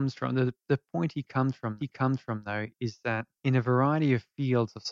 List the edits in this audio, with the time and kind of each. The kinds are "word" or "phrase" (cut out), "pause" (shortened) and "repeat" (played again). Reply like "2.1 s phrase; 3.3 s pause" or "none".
1.8 s repeat; 3.4 s pause